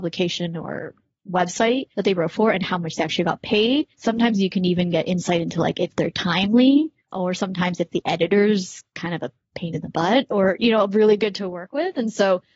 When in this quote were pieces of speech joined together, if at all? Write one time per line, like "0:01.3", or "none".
0:01.9
0:03.9
0:07.0